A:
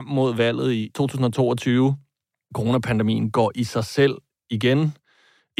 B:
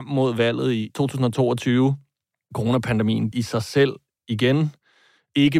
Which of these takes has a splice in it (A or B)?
B